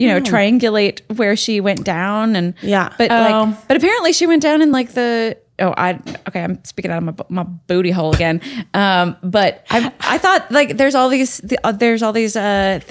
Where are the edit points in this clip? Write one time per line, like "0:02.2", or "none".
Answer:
none